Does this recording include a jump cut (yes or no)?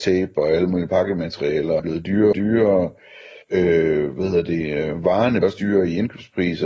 yes